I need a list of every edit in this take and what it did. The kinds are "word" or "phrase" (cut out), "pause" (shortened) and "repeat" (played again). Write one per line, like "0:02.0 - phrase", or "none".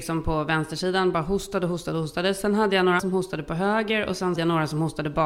0:03.0 - word
0:04.4 - phrase